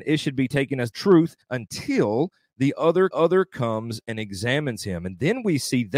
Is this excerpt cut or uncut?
cut